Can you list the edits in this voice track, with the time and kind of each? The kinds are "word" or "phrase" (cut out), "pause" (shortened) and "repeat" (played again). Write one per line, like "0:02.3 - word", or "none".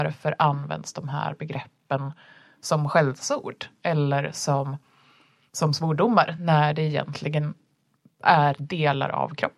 none